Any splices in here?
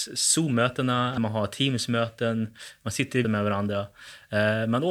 yes; 2 cuts; at 1.2 s, 3.2 s

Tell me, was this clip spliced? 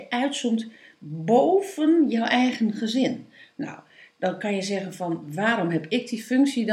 no; 0 cuts

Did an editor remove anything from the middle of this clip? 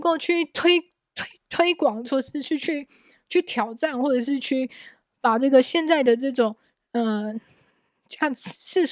no; 0 cuts

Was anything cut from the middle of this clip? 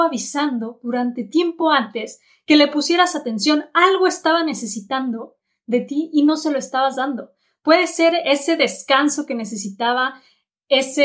no; 0 cuts

